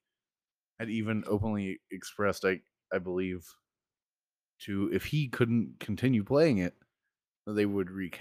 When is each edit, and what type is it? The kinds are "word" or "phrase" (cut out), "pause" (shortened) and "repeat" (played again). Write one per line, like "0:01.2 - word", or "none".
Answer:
none